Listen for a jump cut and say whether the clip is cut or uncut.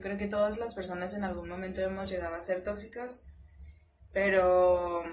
uncut